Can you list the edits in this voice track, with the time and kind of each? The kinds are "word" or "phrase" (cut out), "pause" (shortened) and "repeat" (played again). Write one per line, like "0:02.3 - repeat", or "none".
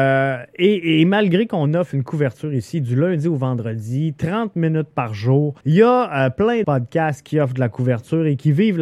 0:05.6 - pause
0:06.6 - word